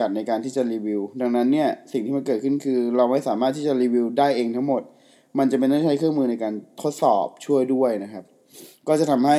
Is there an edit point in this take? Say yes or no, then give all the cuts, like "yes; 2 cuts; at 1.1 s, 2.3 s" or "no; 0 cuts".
no; 0 cuts